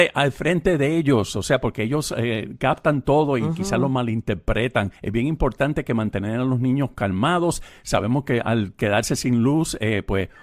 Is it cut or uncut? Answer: cut